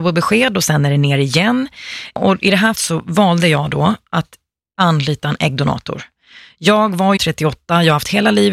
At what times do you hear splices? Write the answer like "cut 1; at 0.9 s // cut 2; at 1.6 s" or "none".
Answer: cut 1; at 2.7 s // cut 2; at 7.2 s